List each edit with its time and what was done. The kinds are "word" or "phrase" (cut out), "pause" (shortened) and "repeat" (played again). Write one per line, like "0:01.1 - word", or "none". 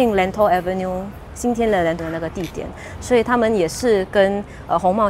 0:02.0 - word